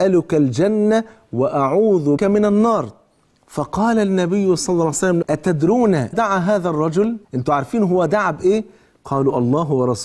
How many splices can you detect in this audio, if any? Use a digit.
4